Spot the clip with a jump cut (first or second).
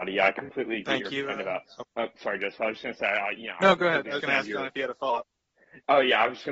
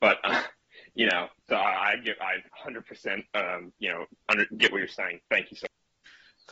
first